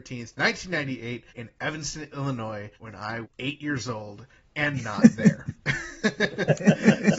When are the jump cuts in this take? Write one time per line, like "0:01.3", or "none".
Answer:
0:01.3
0:02.7
0:03.2